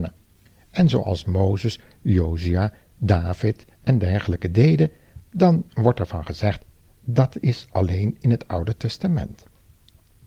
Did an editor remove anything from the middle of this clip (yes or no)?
no